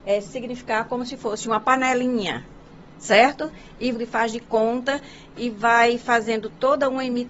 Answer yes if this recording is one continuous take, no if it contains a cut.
no